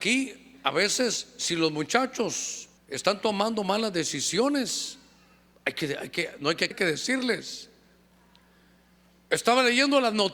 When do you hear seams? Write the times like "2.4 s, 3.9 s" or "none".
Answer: 2.8 s, 6.7 s